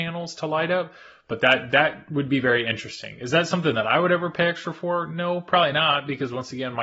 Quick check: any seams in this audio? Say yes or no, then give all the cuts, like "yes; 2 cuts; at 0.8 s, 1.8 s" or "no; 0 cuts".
no; 0 cuts